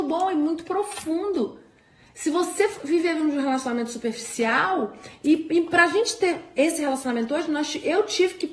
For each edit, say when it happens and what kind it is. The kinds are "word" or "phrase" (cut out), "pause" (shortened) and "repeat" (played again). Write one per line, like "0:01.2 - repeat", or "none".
none